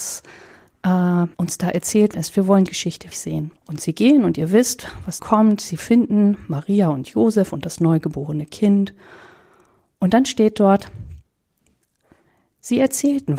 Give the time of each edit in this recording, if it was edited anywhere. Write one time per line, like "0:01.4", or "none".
0:01.3
0:02.1
0:02.7
0:03.1
0:03.6
0:05.2